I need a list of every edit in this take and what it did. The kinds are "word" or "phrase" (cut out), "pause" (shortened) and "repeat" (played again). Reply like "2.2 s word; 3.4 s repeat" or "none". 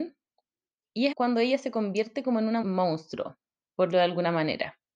1.1 s word; 2.6 s word; 3.9 s word